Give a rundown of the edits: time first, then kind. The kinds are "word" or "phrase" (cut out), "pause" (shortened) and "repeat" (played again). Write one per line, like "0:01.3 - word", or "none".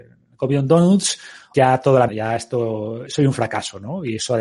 0:01.5 - word
0:02.1 - word
0:03.1 - word